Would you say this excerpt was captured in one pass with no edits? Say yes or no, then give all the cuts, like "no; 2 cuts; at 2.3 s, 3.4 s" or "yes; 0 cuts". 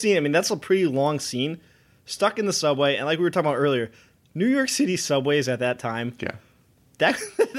yes; 0 cuts